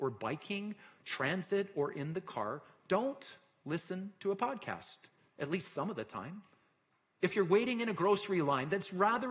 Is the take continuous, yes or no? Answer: yes